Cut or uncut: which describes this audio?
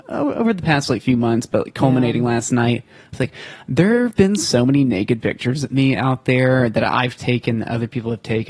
uncut